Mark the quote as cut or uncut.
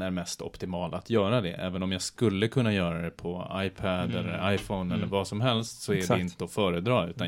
uncut